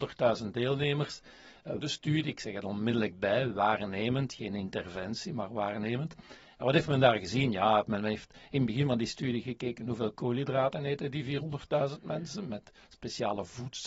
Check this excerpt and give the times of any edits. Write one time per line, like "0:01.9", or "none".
0:01.8